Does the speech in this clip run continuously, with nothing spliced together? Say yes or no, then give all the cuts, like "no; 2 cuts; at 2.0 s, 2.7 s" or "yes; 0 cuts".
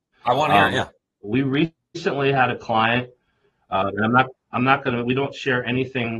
yes; 0 cuts